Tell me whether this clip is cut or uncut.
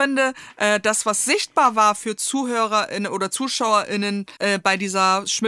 cut